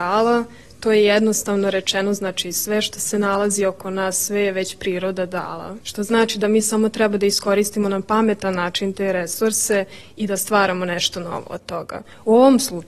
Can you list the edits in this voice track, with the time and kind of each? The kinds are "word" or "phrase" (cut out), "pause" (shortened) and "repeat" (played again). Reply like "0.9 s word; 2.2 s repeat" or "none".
5.8 s pause